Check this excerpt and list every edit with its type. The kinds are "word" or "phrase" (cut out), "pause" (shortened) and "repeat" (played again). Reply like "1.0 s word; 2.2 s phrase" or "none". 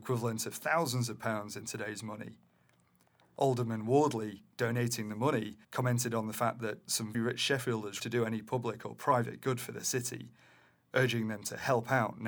5.6 s pause; 7.1 s word; 8.0 s word